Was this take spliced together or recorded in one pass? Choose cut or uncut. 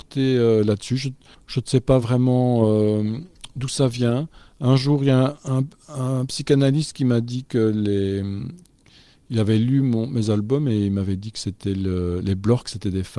uncut